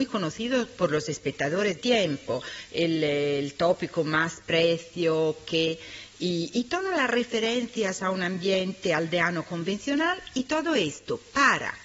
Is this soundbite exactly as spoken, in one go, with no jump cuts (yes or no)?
no